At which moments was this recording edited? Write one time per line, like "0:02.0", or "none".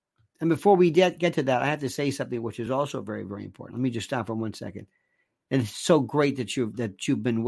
none